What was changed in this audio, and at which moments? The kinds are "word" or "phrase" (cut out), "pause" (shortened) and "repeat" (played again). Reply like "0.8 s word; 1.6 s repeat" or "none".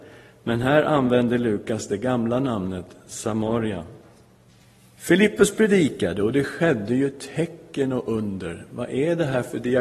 4.5 s pause